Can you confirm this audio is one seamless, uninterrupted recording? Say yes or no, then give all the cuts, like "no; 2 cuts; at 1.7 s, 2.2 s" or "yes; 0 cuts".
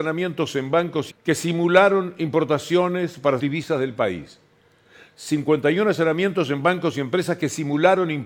no; 2 cuts; at 1.1 s, 3.4 s